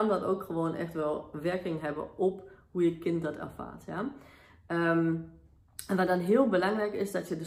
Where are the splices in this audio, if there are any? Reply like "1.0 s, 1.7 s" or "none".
none